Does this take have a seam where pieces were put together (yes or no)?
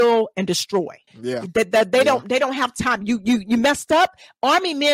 yes